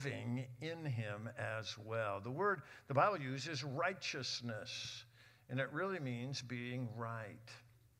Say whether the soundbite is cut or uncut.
uncut